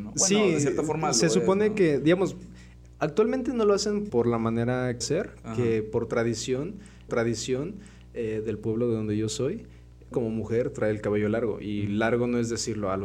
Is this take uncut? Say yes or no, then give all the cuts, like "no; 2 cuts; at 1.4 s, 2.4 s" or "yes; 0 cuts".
no; 5 cuts; at 2.9 s, 4.1 s, 5.0 s, 7.1 s, 10.1 s